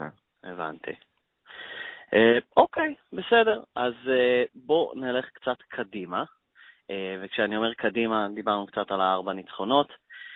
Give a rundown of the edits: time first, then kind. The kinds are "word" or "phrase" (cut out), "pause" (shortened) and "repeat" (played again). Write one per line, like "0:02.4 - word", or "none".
none

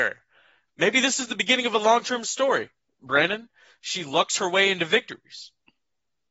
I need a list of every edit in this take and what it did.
none

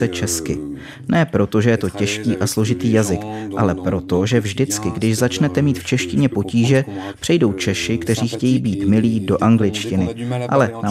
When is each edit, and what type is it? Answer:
none

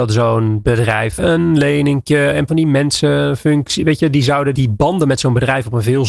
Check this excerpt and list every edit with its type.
0:01.2 - phrase
0:02.5 - word
0:04.5 - word

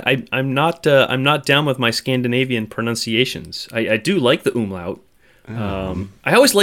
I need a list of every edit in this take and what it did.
none

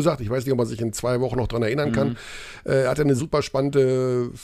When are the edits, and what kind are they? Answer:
0:03.2 - word

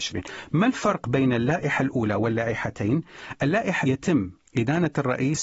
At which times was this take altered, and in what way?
0:03.8 - word

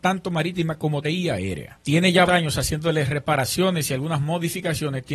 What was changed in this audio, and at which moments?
0:01.0 - word
0:02.3 - word

